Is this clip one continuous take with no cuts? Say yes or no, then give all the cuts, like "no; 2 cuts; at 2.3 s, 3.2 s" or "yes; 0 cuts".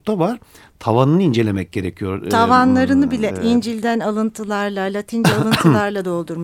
no; 1 cut; at 3.3 s